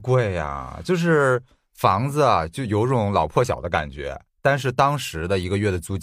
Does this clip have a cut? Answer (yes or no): no